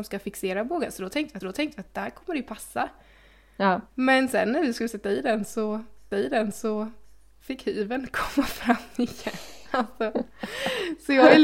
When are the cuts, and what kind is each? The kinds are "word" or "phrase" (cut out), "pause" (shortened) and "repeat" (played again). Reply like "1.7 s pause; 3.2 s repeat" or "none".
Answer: 1.4 s repeat; 6.1 s repeat